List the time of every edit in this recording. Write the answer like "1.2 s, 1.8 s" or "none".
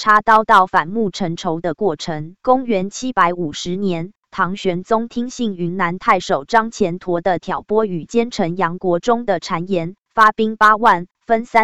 2.4 s